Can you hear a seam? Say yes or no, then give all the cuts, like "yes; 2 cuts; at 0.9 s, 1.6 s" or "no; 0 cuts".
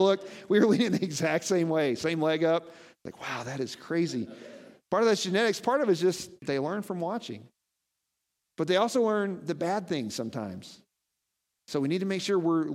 yes; 1 cut; at 6.4 s